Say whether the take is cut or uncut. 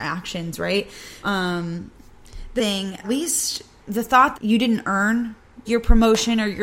cut